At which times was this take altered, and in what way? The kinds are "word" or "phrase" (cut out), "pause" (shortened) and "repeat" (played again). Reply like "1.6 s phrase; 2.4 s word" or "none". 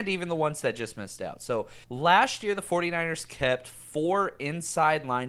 1.8 s pause